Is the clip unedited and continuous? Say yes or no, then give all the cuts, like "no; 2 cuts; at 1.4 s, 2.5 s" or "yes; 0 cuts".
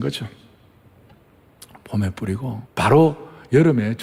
no; 1 cut; at 2.7 s